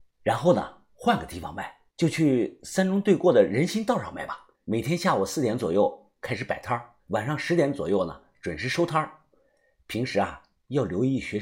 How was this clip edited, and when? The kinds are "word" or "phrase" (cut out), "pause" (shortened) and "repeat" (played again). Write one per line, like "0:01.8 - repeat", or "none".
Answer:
0:01.9 - pause
0:04.5 - pause
0:07.0 - pause